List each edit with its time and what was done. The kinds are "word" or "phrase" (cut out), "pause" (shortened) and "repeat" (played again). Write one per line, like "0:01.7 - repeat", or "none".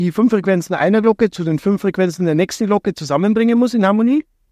none